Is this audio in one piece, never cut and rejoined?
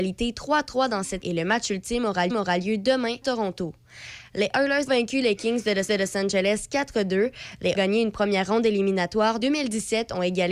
no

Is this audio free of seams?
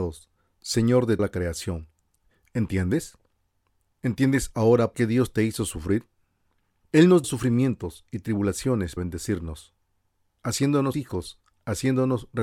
no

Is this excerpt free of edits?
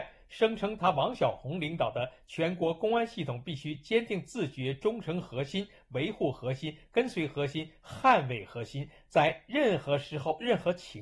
yes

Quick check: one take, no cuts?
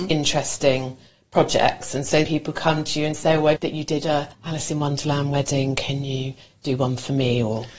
no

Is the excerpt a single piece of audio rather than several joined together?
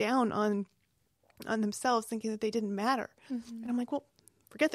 yes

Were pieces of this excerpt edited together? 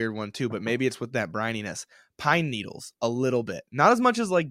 no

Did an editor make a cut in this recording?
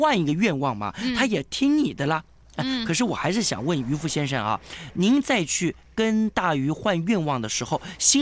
no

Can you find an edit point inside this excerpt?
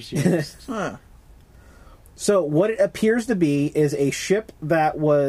no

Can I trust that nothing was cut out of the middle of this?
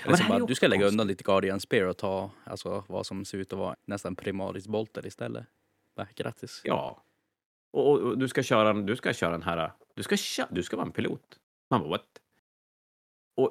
no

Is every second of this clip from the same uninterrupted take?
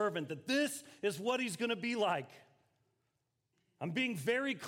yes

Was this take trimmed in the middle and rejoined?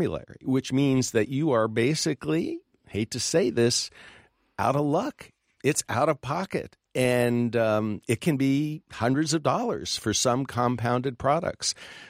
no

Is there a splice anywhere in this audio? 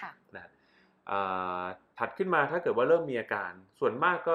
no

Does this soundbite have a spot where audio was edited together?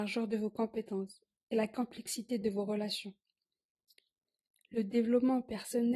no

